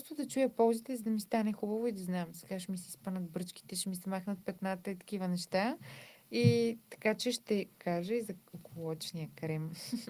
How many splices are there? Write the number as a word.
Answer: zero